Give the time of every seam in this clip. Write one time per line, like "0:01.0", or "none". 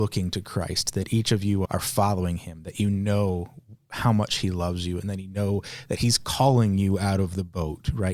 0:01.6

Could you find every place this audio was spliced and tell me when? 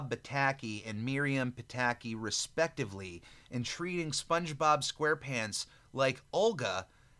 none

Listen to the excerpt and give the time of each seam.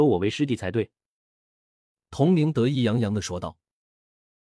none

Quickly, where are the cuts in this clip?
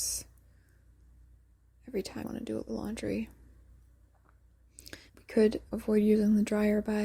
0:02.2
0:02.7
0:05.1
0:05.7

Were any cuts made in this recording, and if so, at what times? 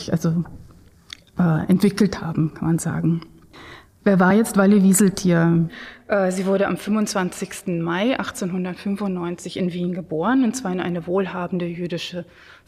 none

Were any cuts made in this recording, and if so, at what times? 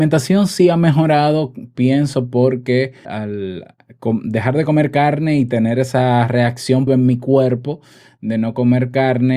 0:03.0
0:06.9

